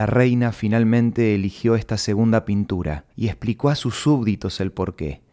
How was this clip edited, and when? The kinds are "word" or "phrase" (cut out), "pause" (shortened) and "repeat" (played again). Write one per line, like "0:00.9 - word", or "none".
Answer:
0:03.1 - pause